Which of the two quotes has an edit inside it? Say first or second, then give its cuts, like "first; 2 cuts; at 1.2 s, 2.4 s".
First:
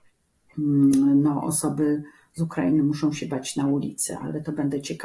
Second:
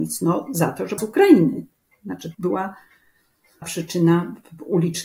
second; 3 cuts; at 1.0 s, 2.3 s, 3.6 s